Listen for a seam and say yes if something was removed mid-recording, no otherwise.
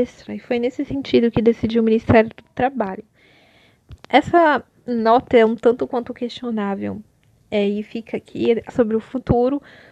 yes